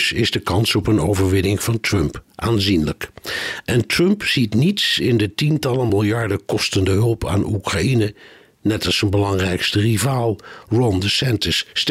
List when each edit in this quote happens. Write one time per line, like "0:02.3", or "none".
none